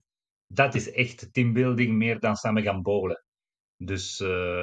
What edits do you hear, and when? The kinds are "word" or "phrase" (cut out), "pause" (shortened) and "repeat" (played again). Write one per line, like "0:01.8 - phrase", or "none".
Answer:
none